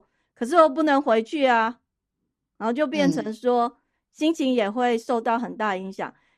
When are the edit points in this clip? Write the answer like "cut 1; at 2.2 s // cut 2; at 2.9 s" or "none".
none